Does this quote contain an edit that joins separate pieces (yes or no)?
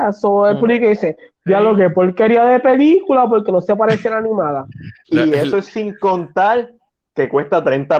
no